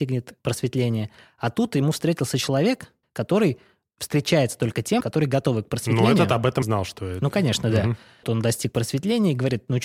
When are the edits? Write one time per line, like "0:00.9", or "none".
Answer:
0:03.0
0:05.0
0:06.6
0:08.2